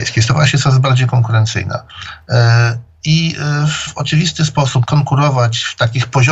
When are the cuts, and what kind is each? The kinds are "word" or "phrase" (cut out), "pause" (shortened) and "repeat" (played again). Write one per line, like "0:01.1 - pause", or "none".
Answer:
0:03.9 - word
0:04.8 - word